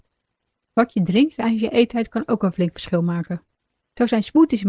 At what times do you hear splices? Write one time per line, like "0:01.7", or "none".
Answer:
none